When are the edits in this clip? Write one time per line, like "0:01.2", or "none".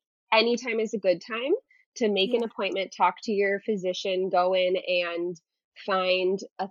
none